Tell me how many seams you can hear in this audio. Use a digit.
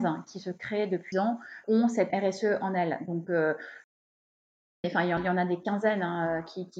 4